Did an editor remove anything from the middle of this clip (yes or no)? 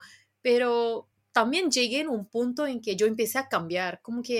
no